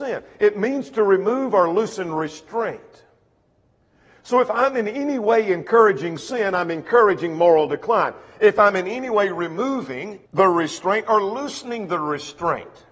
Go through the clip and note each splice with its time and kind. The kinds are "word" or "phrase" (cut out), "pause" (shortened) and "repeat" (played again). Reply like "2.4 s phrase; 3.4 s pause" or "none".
10.3 s pause

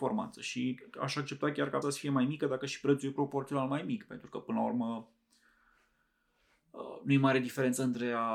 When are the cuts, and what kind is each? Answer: 1.8 s word

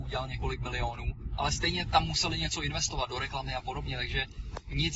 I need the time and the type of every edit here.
none

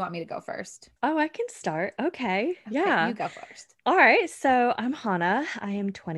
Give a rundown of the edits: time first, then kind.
1.0 s pause

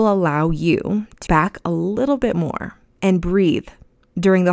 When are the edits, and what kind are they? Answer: 1.3 s word

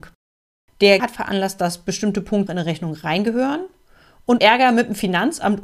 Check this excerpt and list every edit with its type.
1.0 s word; 2.5 s word; 4.4 s word

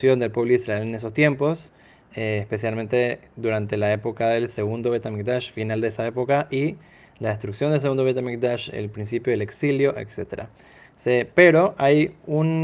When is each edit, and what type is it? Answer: none

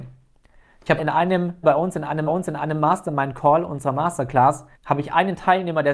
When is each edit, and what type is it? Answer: 1.0 s word; 1.6 s word; 2.3 s repeat; 4.7 s pause

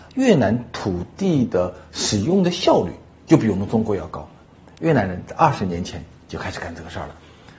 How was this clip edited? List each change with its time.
none

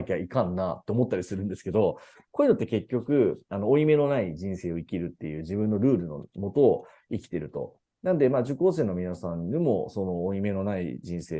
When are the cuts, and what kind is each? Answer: none

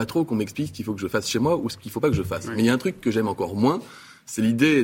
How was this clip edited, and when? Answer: none

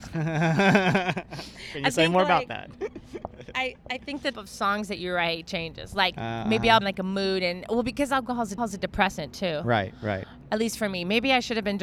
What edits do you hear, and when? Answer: 4.3 s word; 5.5 s word; 6.8 s phrase; 8.6 s repeat

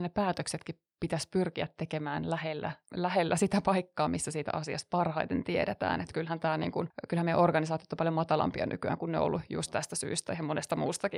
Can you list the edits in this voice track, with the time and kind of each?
none

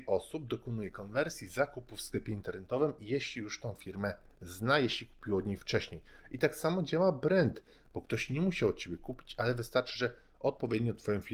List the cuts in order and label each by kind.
none

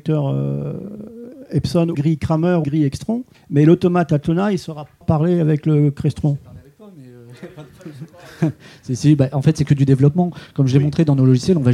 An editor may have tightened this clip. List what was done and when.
1.9 s word; 2.6 s word; 3.3 s pause; 5.0 s word

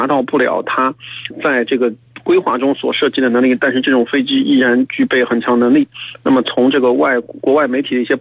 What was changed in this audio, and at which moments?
1.3 s word

